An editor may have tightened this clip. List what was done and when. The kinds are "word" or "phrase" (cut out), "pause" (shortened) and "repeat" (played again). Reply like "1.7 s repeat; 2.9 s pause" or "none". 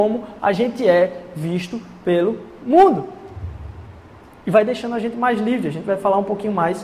none